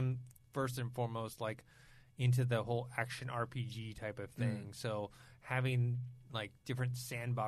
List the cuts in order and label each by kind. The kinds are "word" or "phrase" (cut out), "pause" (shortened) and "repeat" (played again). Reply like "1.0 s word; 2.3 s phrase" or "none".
none